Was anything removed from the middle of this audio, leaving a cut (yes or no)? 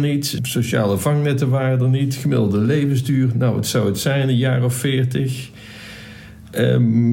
no